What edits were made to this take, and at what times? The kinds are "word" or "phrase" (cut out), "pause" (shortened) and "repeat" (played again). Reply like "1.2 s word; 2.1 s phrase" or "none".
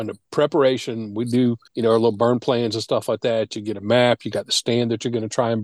1.7 s pause